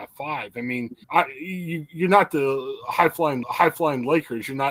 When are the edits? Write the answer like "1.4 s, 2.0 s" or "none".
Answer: 1.0 s, 3.4 s